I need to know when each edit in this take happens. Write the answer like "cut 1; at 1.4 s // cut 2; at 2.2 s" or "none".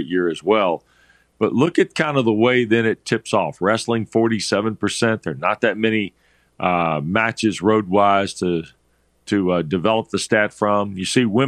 none

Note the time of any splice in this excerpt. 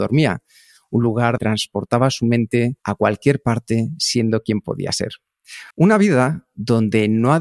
cut 1; at 1.4 s // cut 2; at 2.8 s // cut 3; at 5.7 s

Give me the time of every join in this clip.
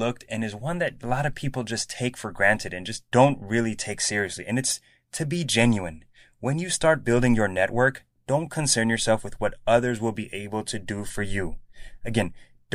none

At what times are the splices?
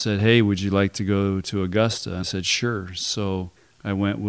cut 1; at 2.2 s

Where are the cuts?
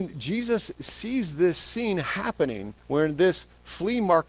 cut 1; at 2.8 s

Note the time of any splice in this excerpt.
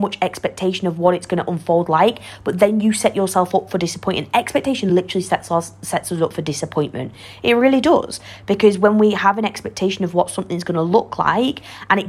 none

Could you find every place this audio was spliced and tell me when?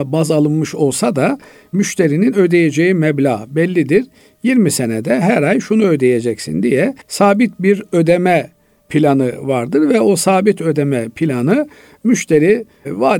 cut 1; at 7.0 s

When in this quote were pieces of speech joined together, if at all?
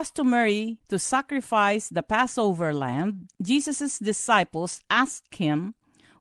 cut 1; at 3.3 s

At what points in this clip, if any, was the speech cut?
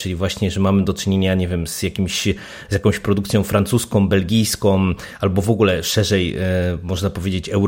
none

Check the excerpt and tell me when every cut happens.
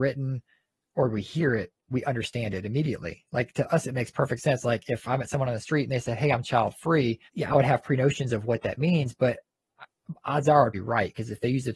cut 1; at 7.3 s // cut 2; at 9.7 s // cut 3; at 10.7 s

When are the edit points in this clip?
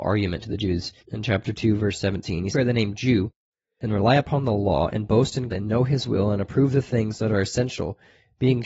cut 1; at 1.0 s // cut 2; at 2.5 s // cut 3; at 5.5 s

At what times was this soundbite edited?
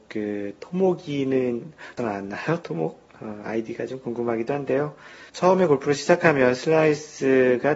cut 1; at 2.0 s // cut 2; at 5.3 s

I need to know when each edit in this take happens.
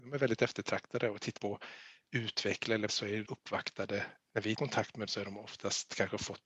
cut 1; at 1.4 s // cut 2; at 2.9 s // cut 3; at 3.2 s // cut 4; at 4.6 s // cut 5; at 5.1 s

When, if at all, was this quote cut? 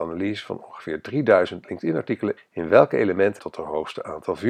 cut 1; at 2.4 s // cut 2; at 3.4 s

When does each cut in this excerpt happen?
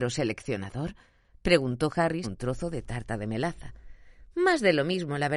cut 1; at 2.2 s

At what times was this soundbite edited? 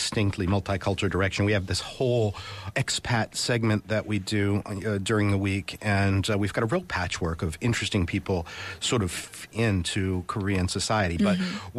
cut 1; at 2.7 s // cut 2; at 9.5 s

